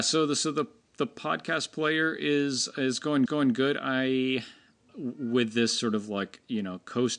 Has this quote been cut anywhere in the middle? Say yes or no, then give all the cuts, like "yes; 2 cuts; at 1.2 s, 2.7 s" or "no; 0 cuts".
yes; 2 cuts; at 3.3 s, 4.9 s